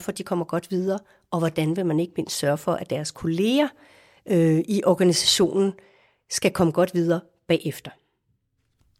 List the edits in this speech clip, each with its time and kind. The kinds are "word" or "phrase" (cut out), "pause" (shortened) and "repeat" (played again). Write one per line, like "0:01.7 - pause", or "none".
none